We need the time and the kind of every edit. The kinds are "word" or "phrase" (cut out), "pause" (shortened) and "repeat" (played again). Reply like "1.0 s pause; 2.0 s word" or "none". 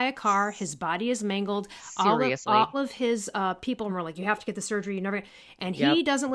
2.7 s word; 3.9 s word